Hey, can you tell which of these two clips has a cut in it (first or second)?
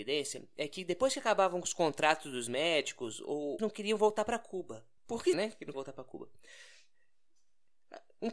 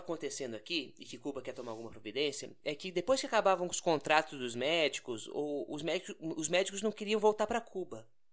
first